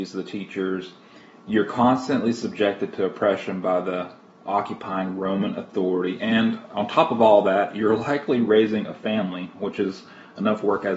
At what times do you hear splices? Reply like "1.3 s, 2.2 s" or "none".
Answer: none